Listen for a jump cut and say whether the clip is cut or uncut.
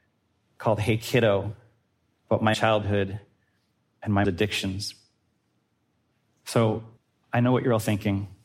cut